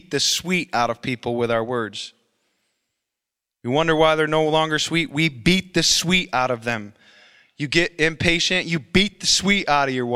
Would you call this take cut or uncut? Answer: uncut